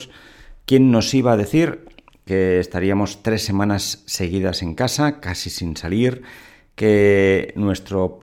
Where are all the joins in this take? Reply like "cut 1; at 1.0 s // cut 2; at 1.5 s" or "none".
none